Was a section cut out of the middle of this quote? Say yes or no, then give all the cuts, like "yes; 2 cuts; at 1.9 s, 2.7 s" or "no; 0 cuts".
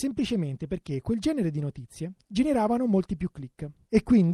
no; 0 cuts